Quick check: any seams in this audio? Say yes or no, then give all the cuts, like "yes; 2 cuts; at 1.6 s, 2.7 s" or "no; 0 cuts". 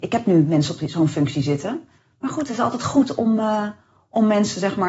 no; 0 cuts